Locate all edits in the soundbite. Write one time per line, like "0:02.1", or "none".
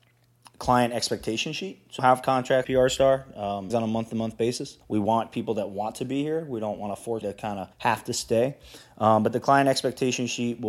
0:02.0
0:02.6
0:03.7
0:04.8
0:07.2
0:07.7